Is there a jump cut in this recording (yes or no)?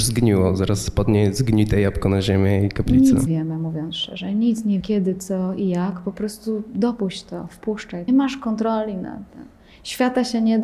yes